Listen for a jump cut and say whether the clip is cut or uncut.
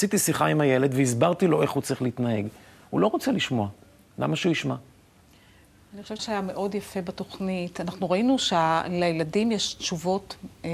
cut